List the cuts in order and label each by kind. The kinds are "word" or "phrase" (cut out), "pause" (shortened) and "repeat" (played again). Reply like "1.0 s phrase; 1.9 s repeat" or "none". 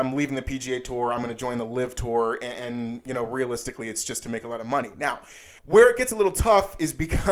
5.6 s pause